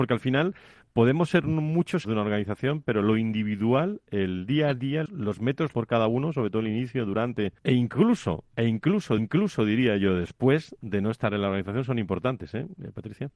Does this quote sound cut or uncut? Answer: cut